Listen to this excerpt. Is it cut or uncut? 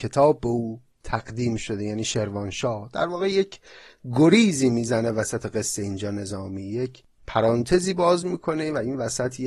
uncut